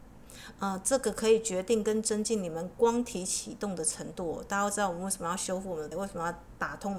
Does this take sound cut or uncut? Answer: cut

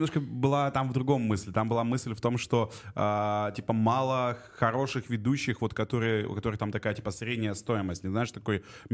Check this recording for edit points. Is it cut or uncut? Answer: uncut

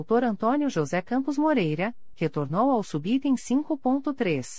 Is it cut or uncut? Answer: uncut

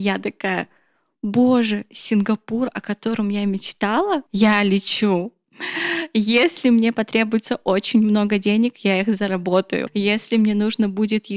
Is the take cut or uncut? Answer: uncut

